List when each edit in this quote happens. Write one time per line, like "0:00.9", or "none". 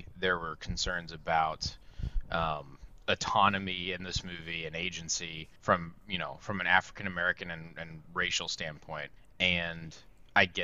0:05.6
0:09.2

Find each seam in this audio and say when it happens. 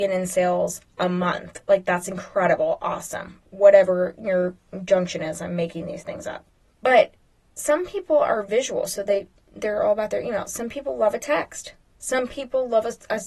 none

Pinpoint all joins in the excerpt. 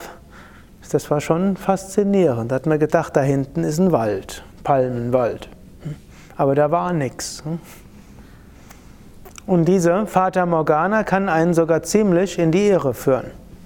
0:04.5

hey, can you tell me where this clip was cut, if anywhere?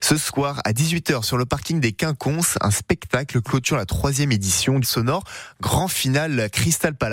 0:04.8

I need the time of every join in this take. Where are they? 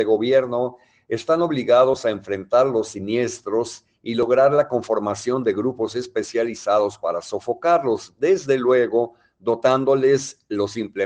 none

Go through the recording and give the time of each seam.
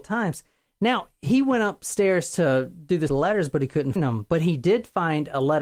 0:03.1
0:04.0

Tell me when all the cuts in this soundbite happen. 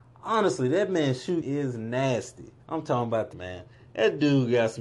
0:01.4
0:02.6
0:03.3

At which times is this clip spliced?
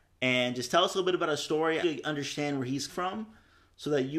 0:01.8
0:02.9

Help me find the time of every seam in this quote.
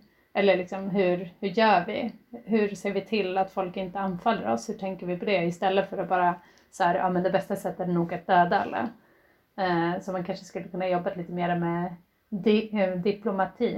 none

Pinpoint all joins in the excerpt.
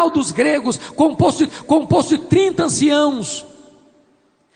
0:01.5

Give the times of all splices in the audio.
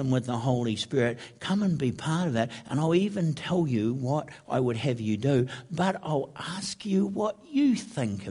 none

